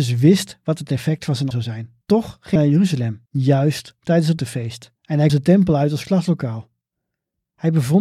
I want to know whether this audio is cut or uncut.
cut